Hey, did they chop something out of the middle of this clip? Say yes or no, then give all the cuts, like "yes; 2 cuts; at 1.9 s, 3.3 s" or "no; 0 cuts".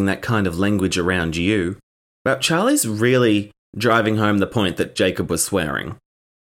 no; 0 cuts